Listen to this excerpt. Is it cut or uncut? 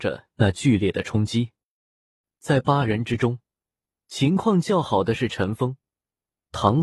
uncut